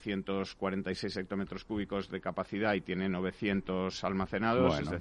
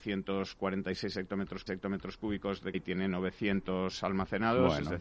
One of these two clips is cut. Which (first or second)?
second